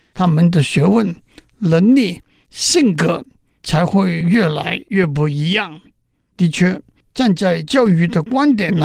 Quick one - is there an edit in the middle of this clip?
no; 0 cuts

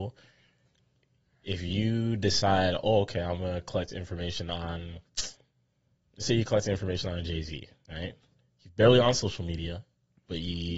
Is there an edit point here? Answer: no; 0 cuts

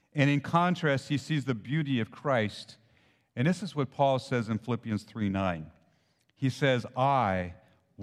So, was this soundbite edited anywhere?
no; 0 cuts

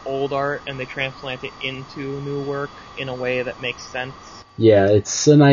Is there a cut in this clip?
no; 0 cuts

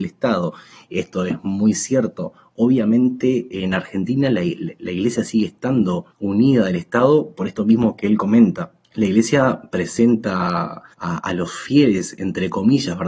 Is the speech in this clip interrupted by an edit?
yes; 3 cuts; at 6.1 s, 8.8 s, 10.9 s

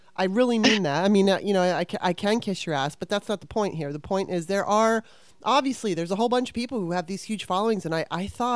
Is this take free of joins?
yes; 0 cuts

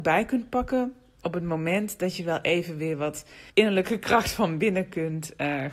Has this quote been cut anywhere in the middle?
yes; 1 cut; at 3.5 s

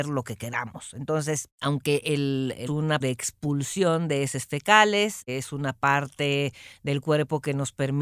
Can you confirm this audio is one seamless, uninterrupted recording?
no; 2 cuts; at 2.7 s, 3.0 s

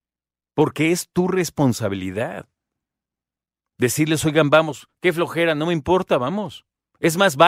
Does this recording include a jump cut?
no; 0 cuts

